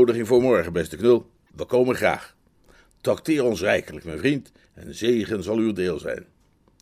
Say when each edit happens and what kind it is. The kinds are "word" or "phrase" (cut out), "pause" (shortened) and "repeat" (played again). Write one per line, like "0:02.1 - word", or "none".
none